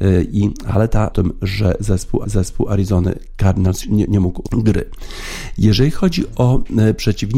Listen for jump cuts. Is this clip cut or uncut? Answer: cut